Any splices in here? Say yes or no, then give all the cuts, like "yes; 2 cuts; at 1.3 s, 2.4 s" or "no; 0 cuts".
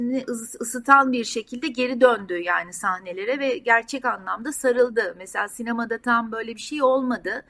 no; 0 cuts